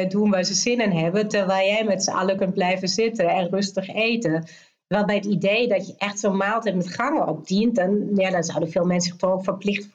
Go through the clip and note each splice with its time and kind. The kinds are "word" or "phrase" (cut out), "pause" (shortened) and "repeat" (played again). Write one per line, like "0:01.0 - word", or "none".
none

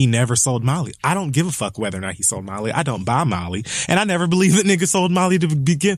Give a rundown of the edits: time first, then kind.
none

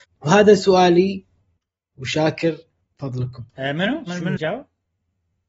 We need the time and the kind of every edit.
0:03.5 - pause
0:04.4 - word

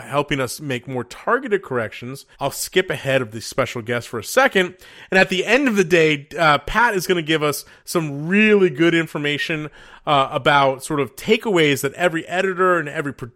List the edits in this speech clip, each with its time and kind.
0:02.3 - pause

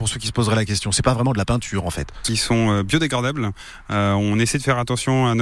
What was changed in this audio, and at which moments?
0:02.3 - phrase

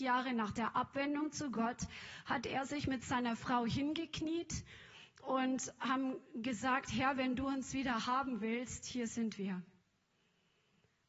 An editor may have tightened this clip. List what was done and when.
none

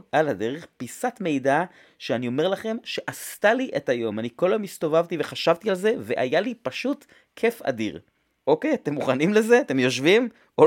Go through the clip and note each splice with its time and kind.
none

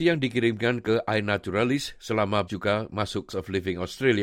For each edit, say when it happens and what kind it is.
0:02.5 - word
0:03.3 - phrase

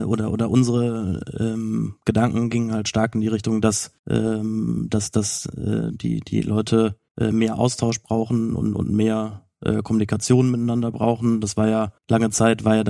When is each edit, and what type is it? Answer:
0:04.0 - pause
0:07.1 - pause
0:12.0 - pause

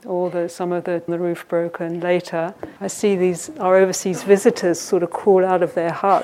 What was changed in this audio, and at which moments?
0:01.1 - phrase
0:02.8 - pause

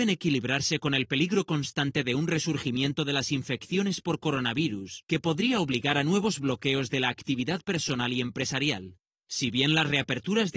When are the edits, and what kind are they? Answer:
none

